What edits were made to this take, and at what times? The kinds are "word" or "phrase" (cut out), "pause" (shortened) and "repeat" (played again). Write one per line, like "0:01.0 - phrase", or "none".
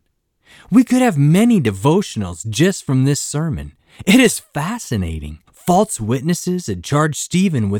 0:05.5 - pause